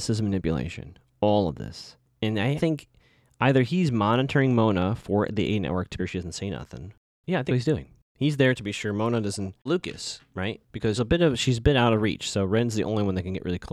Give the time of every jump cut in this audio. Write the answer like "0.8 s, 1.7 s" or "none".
2.6 s, 6.0 s, 7.5 s, 9.7 s, 11.0 s